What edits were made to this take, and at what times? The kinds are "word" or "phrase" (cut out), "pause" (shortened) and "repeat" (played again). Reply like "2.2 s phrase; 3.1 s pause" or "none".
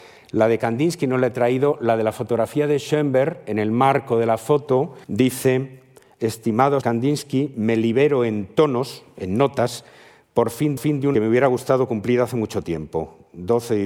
5.0 s pause; 6.8 s word; 10.8 s repeat; 11.1 s phrase